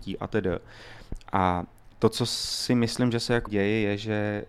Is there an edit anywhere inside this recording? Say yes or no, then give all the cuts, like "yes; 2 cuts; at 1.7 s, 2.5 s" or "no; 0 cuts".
yes; 1 cut; at 3.5 s